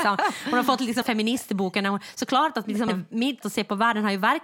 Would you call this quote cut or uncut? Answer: cut